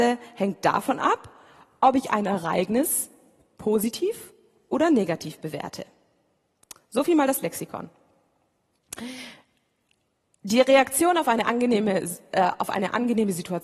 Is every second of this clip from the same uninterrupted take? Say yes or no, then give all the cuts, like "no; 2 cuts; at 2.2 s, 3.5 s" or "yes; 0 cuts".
yes; 0 cuts